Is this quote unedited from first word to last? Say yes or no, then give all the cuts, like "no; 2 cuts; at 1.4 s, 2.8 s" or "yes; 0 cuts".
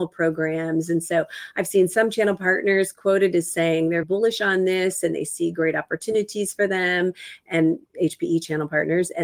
no; 1 cut; at 4.0 s